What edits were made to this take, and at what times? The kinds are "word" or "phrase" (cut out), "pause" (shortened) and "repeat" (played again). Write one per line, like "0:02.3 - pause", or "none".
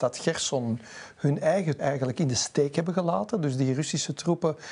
0:01.8 - word